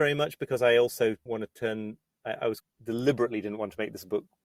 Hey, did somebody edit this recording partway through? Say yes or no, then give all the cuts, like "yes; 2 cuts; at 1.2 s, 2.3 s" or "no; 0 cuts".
yes; 2 cuts; at 1.3 s, 2.6 s